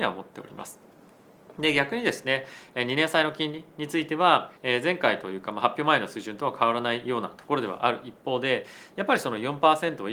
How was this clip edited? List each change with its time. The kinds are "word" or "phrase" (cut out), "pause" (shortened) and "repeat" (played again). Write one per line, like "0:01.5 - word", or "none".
0:04.6 - pause